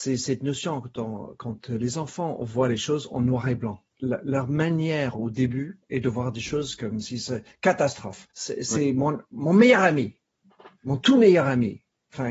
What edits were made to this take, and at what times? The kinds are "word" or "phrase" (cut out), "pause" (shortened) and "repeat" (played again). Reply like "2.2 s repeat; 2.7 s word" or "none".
3.9 s pause; 5.8 s pause; 8.3 s pause